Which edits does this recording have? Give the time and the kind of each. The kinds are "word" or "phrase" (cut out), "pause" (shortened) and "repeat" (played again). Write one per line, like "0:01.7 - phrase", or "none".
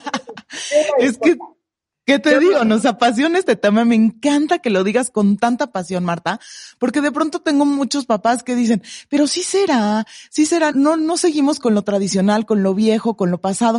0:10.7 - word